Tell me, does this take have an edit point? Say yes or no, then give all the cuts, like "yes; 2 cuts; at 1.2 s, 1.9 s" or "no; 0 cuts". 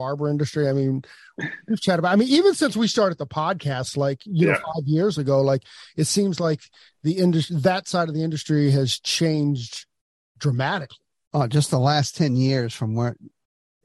no; 0 cuts